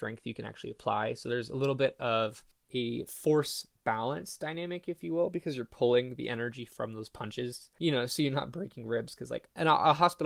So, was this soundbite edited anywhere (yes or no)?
no